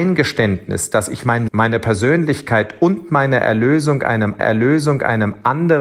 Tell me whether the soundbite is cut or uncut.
cut